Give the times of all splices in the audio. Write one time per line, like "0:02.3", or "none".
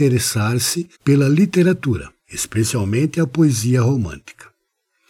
0:00.9
0:02.2